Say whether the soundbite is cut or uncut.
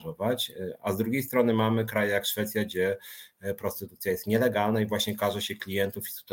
uncut